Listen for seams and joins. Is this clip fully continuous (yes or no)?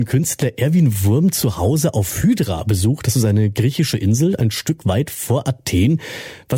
yes